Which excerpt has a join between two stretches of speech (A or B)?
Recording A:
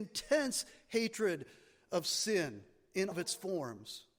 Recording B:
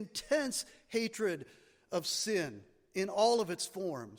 A